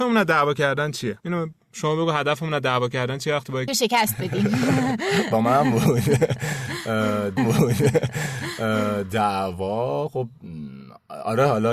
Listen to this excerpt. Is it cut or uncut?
cut